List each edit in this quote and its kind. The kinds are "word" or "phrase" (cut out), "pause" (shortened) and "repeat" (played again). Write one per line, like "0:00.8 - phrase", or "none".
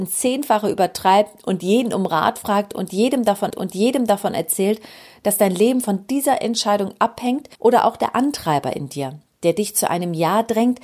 0:03.5 - repeat
0:07.5 - pause